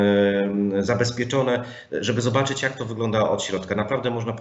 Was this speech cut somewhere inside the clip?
no; 0 cuts

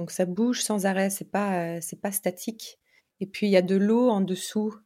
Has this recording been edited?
yes; 1 cut; at 3.0 s

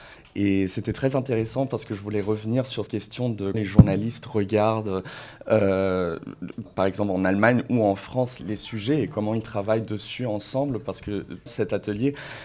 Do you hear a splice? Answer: yes; 5 cuts; at 2.9 s, 3.5 s, 6.7 s, 8.4 s, 11.5 s

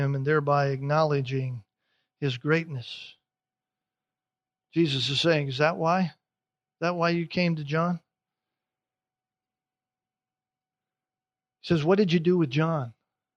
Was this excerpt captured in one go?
yes; 0 cuts

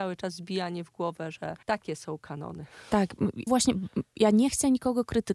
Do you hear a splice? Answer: yes; 2 cuts; at 1.6 s, 3.5 s

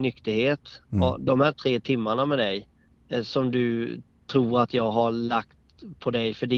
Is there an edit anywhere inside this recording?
no; 0 cuts

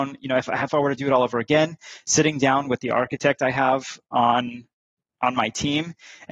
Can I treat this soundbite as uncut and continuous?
yes; 0 cuts

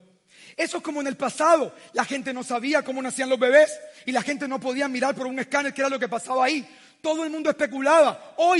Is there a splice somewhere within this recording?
no; 0 cuts

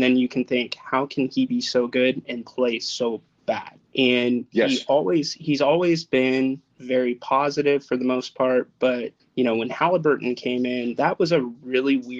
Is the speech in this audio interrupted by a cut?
yes; 3 cuts; at 3.9 s, 6.7 s, 9.2 s

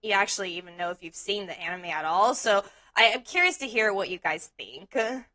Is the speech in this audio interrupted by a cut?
no; 0 cuts

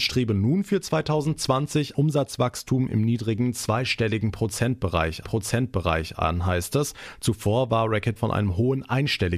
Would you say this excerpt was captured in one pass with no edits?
no; 3 cuts; at 1.9 s, 5.2 s, 8.2 s

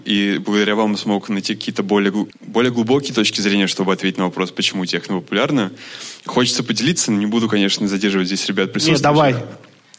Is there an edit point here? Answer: yes; 1 cut; at 2.3 s

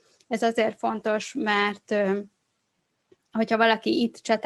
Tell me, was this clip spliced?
no; 0 cuts

